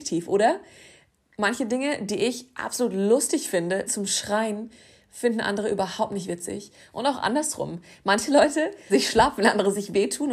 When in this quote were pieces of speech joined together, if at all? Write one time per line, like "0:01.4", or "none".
0:03.9
0:08.9